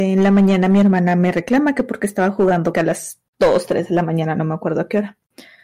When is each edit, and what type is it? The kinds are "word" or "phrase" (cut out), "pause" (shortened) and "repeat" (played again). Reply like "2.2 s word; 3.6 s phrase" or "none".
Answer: 2.7 s phrase; 3.3 s pause